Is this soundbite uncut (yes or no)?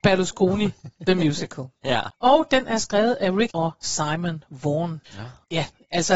no